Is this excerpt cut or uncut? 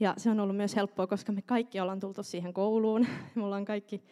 uncut